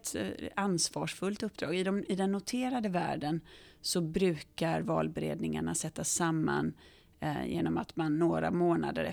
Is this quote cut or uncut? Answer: uncut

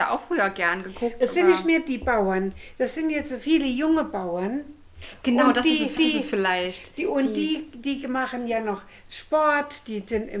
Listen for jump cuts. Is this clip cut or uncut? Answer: cut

